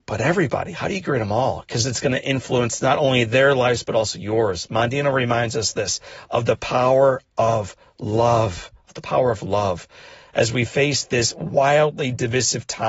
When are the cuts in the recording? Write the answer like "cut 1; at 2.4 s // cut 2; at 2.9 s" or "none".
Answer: none